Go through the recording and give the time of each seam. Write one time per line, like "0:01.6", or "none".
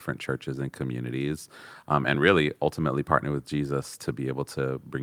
none

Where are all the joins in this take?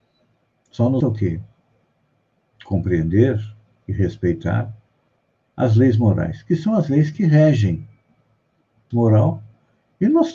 0:01.0
0:08.9

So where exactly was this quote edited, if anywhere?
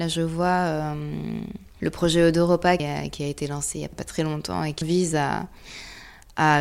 0:02.8
0:03.9
0:04.8

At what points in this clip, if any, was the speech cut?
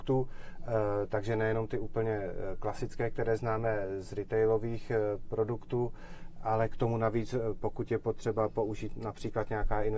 none

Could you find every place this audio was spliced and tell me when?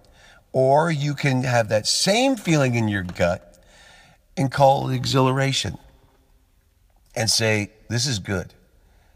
none

